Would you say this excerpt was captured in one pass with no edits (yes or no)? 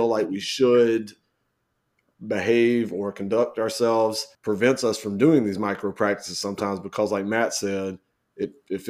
no